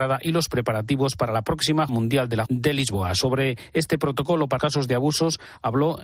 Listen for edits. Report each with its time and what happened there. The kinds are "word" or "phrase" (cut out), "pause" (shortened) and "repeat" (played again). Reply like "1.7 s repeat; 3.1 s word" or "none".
1.9 s word; 2.5 s word; 4.6 s word